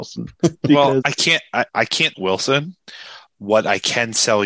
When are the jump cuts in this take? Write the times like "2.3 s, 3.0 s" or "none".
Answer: 1.0 s, 1.7 s, 2.1 s